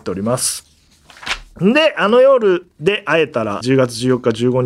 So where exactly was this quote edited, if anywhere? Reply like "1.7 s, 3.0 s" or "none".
3.6 s